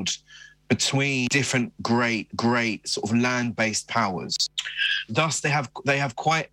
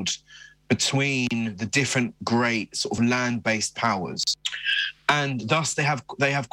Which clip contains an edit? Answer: first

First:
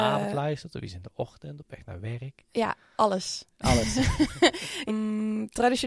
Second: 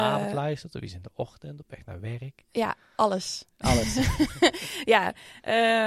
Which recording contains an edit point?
first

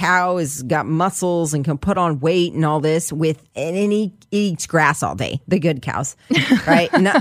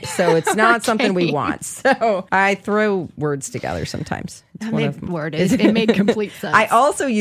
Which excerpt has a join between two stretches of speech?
second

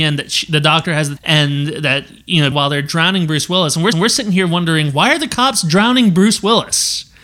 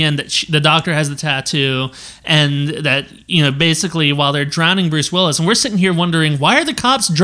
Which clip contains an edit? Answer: first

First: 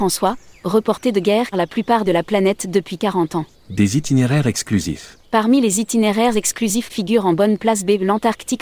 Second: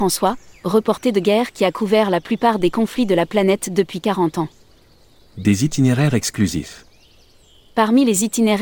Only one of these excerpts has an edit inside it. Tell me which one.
first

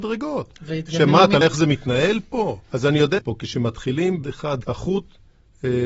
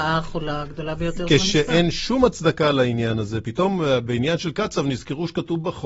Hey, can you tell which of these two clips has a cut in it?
first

